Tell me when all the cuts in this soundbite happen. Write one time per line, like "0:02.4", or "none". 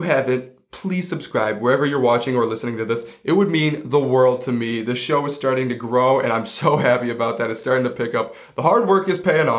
none